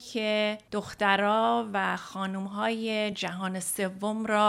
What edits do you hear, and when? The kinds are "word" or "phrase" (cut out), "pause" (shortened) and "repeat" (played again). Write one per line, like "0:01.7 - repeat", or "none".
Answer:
none